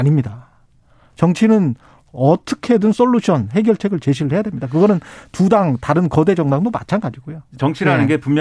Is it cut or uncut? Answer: uncut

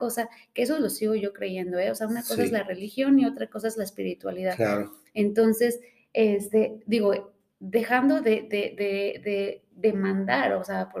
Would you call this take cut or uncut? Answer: uncut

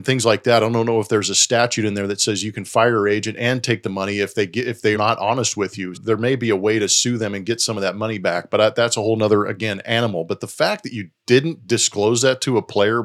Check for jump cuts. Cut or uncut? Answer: cut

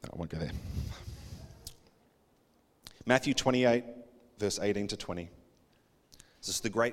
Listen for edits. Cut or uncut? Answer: uncut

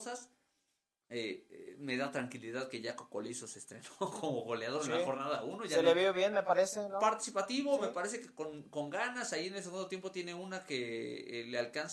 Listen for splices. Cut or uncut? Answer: uncut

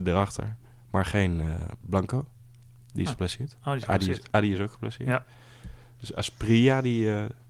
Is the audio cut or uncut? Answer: uncut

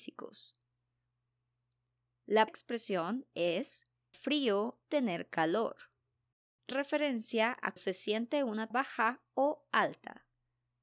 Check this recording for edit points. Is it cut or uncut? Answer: cut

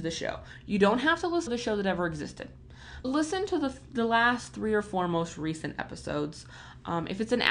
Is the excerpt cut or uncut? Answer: cut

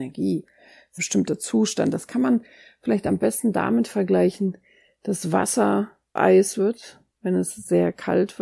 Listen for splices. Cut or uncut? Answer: cut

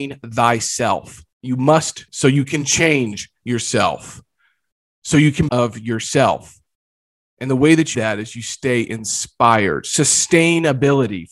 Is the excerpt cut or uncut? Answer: cut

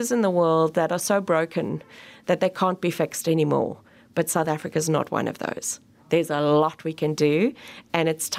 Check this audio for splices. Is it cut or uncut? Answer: uncut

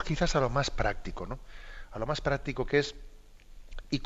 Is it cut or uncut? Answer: uncut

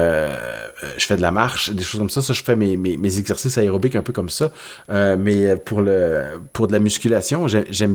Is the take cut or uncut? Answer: uncut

